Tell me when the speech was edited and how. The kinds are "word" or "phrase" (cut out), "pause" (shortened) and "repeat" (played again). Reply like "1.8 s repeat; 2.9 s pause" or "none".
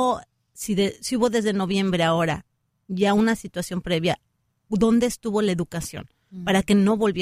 none